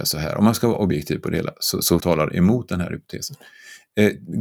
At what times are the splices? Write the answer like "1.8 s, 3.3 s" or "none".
2.0 s

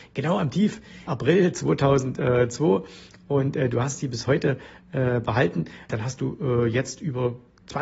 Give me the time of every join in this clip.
1.1 s, 5.9 s

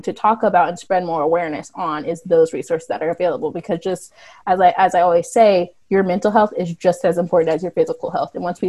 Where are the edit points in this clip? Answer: none

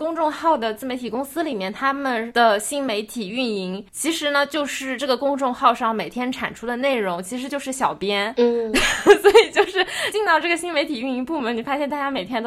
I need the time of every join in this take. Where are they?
3.9 s

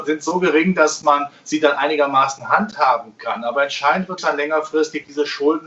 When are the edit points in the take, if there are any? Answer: 4.2 s

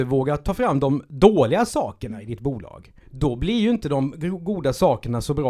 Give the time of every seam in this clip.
3.0 s

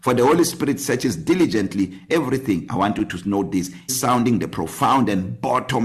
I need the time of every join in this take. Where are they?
2.1 s, 3.9 s

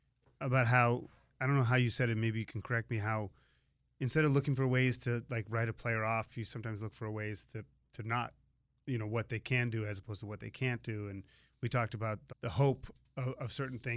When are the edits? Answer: 12.3 s

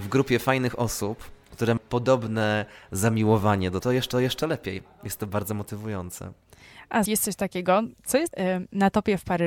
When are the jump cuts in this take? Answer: 1.8 s, 3.8 s, 4.1 s, 7.1 s, 8.3 s

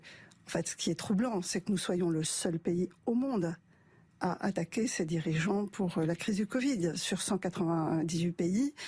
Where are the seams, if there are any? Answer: none

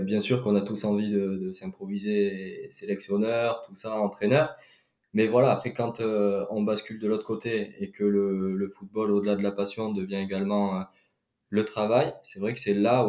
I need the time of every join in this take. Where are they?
none

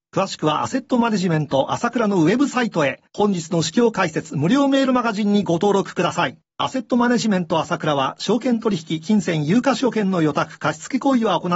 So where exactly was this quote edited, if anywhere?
3.1 s, 6.4 s

